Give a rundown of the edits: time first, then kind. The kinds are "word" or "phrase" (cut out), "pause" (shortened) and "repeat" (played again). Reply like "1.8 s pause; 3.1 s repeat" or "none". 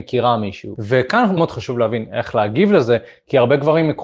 1.4 s word